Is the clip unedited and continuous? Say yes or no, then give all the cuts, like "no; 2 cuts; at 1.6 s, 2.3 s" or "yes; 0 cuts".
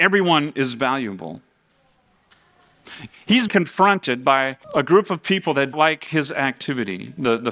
no; 3 cuts; at 3.5 s, 4.6 s, 5.7 s